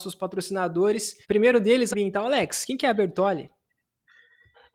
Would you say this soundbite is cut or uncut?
cut